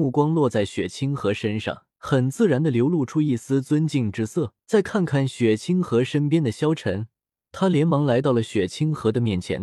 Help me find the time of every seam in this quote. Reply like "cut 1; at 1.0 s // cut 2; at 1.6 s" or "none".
cut 1; at 1.9 s // cut 2; at 4.6 s // cut 3; at 7.5 s